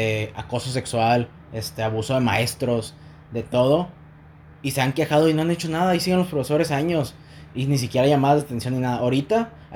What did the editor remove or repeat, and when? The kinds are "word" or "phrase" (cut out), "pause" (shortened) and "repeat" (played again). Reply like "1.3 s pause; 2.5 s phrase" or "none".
none